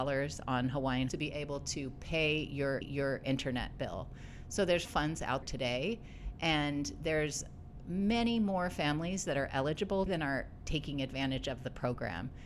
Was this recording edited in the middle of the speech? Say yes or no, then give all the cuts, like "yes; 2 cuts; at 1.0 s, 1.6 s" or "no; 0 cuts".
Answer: yes; 5 cuts; at 1.1 s, 2.8 s, 4.9 s, 5.4 s, 10.1 s